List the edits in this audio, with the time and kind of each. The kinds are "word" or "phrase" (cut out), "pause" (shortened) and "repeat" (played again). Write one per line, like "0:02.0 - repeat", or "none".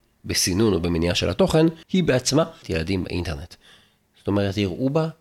0:01.8 - pause
0:02.6 - phrase